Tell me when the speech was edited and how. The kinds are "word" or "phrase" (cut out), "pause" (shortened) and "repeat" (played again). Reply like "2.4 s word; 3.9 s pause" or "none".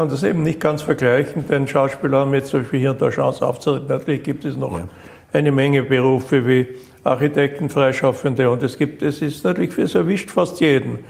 none